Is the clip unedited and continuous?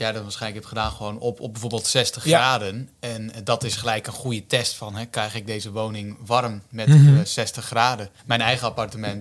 no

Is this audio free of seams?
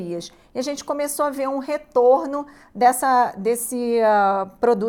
yes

